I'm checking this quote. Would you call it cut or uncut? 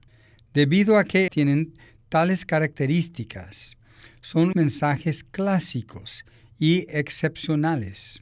cut